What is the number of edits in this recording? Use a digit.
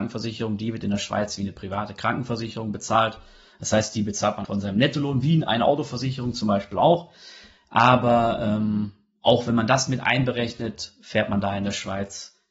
1